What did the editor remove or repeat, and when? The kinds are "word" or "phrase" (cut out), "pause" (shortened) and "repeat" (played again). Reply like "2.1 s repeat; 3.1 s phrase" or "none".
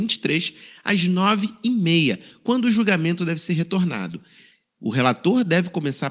none